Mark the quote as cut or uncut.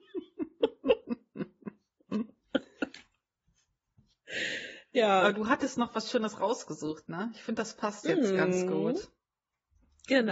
uncut